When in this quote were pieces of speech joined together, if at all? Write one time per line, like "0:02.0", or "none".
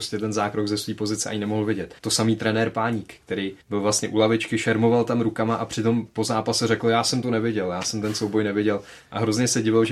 0:02.0
0:03.6